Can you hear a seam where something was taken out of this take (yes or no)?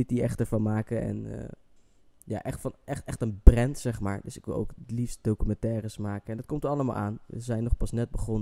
yes